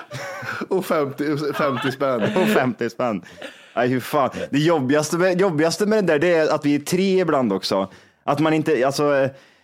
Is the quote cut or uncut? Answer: uncut